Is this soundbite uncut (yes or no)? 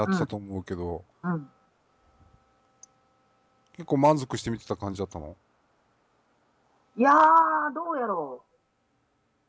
no